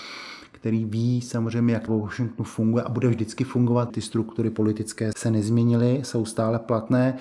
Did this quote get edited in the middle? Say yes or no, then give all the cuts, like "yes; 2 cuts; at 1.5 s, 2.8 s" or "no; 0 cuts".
yes; 3 cuts; at 1.9 s, 3.9 s, 5.1 s